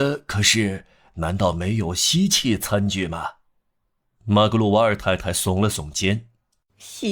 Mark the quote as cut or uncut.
uncut